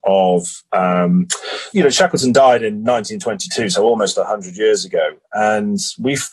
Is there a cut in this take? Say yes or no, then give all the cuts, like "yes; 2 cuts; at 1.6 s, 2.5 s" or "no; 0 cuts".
yes; 1 cut; at 1.7 s